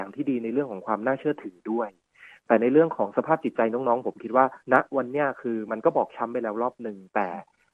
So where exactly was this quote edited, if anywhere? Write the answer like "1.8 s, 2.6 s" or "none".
4.6 s